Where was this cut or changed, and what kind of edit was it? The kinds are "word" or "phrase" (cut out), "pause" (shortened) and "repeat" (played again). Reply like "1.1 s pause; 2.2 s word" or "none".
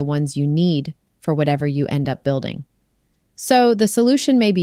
none

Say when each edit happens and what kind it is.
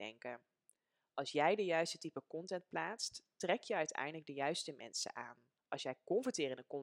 5.6 s pause

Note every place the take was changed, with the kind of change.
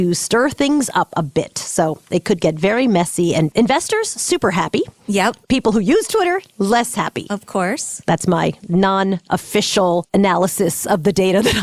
3.5 s word; 5.4 s pause

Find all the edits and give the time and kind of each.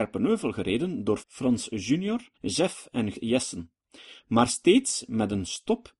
1.2 s phrase; 2.3 s pause; 3.1 s word

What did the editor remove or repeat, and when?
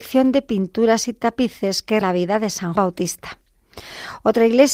2.0 s word; 2.8 s word

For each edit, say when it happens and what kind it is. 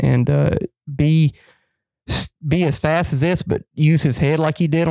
none

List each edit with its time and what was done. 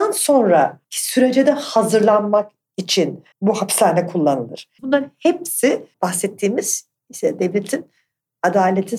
3.3 s pause; 5.9 s word

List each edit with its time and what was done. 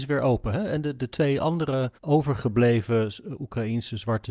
2.0 s pause

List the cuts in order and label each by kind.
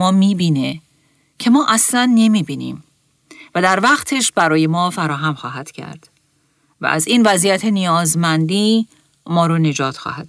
none

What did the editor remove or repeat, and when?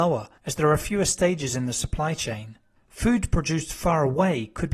none

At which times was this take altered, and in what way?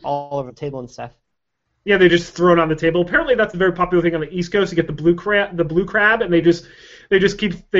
none

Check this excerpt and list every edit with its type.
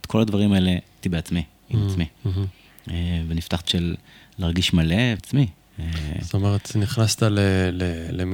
1.0 s word; 3.6 s word; 5.2 s phrase

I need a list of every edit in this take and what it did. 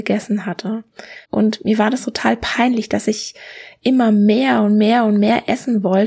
1.2 s pause

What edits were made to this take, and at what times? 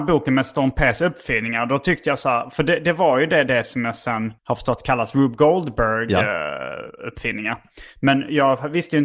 4.4 s pause

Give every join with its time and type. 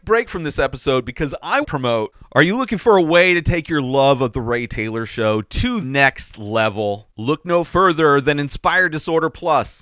1.6 s word; 5.8 s word

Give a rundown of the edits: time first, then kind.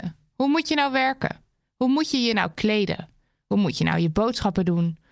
none

